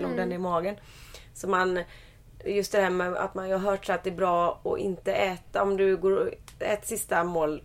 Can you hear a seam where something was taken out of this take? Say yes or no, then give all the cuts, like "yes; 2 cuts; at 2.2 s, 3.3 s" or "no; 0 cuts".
no; 0 cuts